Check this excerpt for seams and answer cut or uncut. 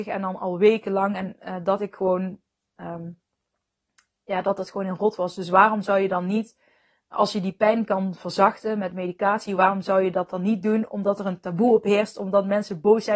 uncut